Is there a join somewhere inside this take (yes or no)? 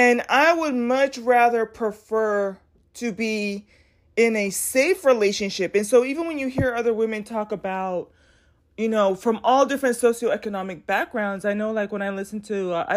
no